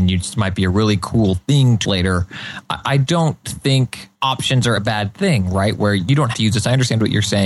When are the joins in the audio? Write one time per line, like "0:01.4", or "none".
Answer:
0:01.8
0:04.1
0:04.8
0:06.3